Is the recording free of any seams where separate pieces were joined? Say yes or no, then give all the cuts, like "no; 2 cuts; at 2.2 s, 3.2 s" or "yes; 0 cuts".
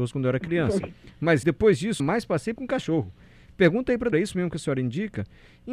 no; 4 cuts; at 1.4 s, 2.0 s, 2.6 s, 4.1 s